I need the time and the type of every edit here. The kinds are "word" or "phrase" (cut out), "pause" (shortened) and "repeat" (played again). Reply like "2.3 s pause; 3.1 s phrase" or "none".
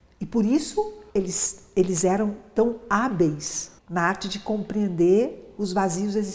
1.1 s pause; 3.8 s pause